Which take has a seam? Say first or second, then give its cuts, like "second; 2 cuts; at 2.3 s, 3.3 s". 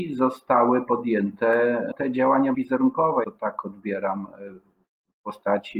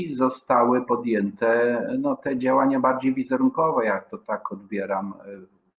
first; 3 cuts; at 1.9 s, 2.5 s, 3.2 s